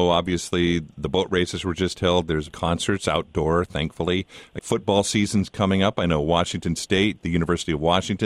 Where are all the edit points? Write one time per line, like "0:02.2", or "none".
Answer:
0:02.5
0:04.6